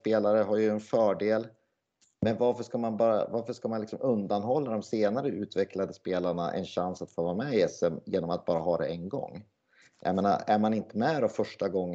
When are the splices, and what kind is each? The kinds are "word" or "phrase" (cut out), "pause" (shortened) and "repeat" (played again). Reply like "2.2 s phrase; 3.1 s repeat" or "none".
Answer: none